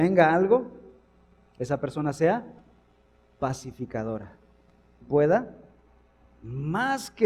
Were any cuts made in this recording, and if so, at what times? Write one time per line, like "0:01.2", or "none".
0:05.0